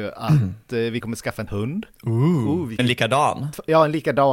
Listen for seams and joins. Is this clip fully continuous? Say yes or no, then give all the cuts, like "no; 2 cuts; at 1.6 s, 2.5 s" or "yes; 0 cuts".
no; 3 cuts; at 1.0 s, 1.5 s, 2.8 s